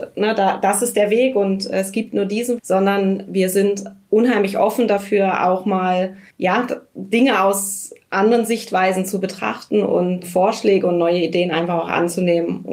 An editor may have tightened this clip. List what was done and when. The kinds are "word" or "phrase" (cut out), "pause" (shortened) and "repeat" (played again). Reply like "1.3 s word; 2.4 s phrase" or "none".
2.6 s word